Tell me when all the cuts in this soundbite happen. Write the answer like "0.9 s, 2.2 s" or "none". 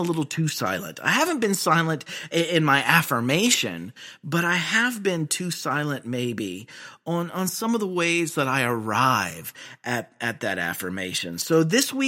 none